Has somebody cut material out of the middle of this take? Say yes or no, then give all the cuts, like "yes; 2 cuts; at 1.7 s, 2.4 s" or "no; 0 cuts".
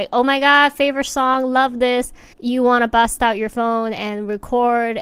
yes; 1 cut; at 2.3 s